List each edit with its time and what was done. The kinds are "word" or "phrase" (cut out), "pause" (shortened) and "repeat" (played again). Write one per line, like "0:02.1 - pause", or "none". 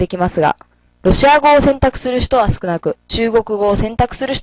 0:03.0 - pause